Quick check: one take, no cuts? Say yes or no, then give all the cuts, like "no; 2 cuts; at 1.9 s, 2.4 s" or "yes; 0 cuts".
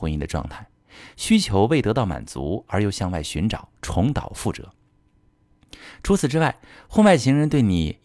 no; 1 cut; at 3.8 s